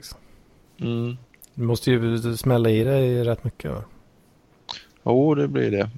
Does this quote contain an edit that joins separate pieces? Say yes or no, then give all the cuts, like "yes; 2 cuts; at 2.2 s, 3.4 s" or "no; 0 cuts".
no; 0 cuts